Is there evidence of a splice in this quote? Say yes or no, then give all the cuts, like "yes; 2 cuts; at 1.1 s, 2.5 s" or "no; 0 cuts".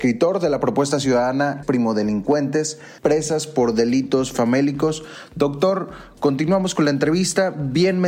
yes; 2 cuts; at 1.6 s, 3.0 s